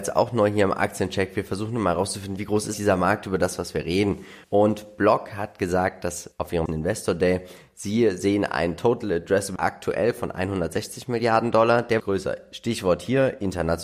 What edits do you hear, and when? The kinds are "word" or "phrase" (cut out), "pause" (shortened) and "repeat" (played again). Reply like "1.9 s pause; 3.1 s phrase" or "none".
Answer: 2.7 s word; 4.4 s pause; 6.3 s pause; 6.7 s word; 9.6 s word; 12.0 s phrase